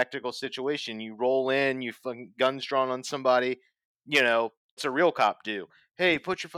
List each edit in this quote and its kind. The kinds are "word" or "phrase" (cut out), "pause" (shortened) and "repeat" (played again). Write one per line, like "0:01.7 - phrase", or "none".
0:04.8 - word